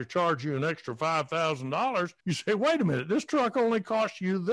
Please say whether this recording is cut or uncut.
cut